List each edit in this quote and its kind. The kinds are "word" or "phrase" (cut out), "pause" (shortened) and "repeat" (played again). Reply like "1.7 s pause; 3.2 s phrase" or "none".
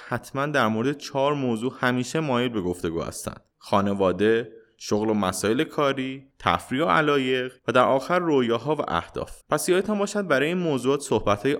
3.5 s pause; 6.3 s pause; 7.6 s pause; 9.4 s pause